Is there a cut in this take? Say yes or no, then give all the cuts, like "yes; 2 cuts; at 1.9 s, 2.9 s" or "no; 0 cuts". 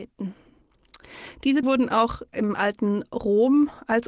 yes; 2 cuts; at 1.6 s, 2.3 s